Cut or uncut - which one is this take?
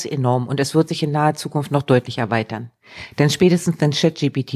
uncut